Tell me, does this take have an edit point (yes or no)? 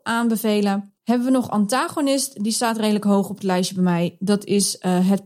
yes